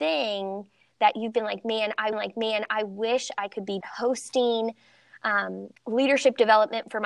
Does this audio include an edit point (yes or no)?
yes